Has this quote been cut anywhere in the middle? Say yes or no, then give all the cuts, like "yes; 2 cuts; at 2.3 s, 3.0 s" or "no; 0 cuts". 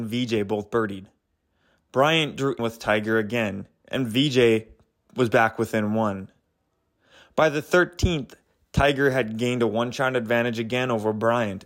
yes; 1 cut; at 2.6 s